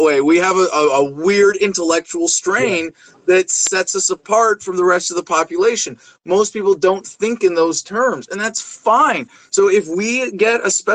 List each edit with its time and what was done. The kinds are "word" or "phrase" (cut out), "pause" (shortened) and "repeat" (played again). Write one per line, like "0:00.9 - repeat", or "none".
none